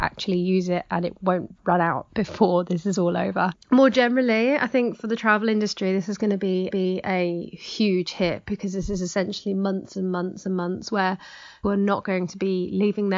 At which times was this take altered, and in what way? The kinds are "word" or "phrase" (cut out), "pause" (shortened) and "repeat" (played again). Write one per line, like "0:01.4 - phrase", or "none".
0:03.6 - pause
0:06.7 - repeat
0:11.6 - word